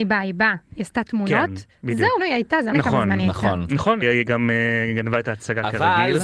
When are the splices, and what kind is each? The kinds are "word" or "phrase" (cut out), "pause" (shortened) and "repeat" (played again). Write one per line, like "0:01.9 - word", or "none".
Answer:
0:02.2 - word
0:02.7 - word
0:04.0 - word

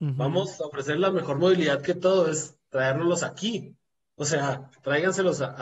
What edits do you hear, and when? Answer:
none

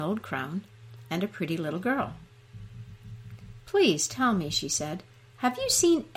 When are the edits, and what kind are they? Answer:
none

